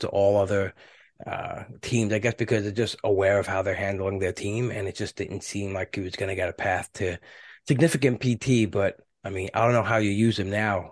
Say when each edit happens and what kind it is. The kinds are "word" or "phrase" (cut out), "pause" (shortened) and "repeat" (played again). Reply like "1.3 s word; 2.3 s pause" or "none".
none